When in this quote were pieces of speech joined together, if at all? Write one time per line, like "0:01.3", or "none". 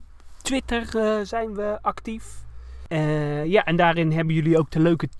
none